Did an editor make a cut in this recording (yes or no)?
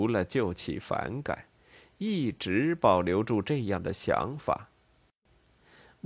no